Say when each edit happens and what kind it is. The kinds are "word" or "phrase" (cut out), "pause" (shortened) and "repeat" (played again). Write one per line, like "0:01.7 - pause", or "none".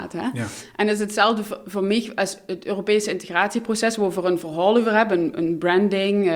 none